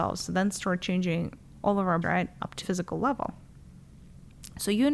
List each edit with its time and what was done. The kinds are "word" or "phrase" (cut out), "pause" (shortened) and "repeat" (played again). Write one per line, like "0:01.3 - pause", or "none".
0:02.0 - word
0:02.6 - word